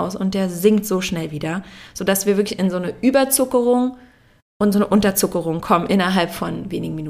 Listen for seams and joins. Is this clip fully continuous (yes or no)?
yes